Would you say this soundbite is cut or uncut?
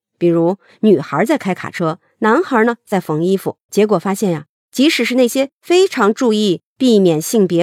cut